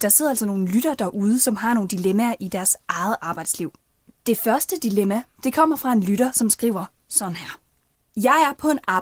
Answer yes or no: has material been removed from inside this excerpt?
no